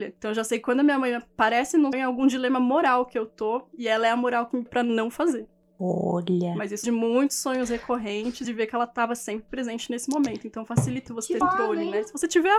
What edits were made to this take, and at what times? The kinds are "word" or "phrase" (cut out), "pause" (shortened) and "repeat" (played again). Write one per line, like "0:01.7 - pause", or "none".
0:01.9 - word
0:04.7 - word
0:06.8 - word
0:08.4 - word
0:11.1 - word
0:11.4 - word